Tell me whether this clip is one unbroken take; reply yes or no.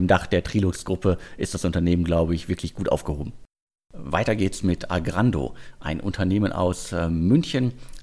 yes